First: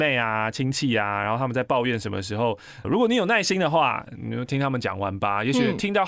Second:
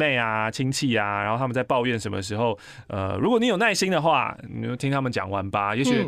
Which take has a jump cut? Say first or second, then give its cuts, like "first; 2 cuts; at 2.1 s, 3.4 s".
first; 1 cut; at 2.8 s